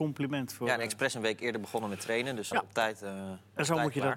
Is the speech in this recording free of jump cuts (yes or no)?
no